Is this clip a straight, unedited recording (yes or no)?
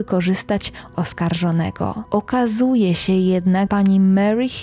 no